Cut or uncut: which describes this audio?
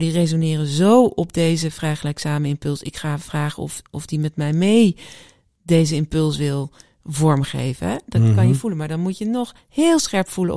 uncut